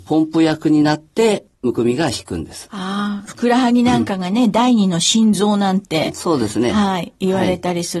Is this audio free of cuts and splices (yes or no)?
no